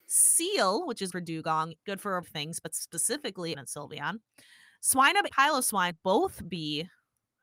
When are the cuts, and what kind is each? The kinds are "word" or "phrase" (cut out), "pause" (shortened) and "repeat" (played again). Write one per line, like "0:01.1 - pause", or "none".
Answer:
0:01.1 - word
0:01.8 - word
0:02.2 - word
0:03.5 - word
0:05.3 - word
0:05.9 - word